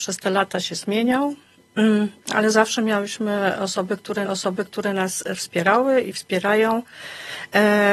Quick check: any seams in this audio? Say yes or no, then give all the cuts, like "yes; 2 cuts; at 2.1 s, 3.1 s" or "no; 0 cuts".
yes; 1 cut; at 4.2 s